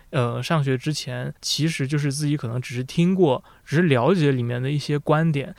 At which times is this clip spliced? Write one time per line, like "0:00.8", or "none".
0:01.4

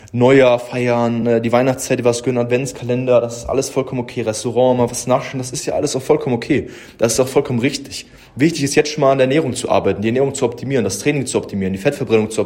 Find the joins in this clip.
none

